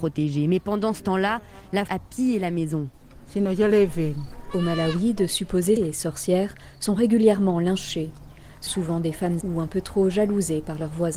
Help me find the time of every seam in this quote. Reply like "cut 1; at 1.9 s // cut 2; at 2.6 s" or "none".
cut 1; at 1.9 s // cut 2; at 5.8 s // cut 3; at 8.7 s // cut 4; at 9.4 s